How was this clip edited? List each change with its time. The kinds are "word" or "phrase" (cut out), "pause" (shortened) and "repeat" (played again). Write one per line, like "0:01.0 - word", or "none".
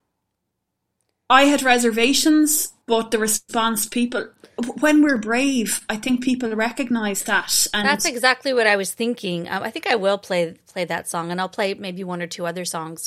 0:02.8 - pause